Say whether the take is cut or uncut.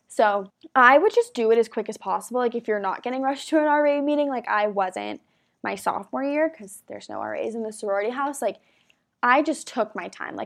uncut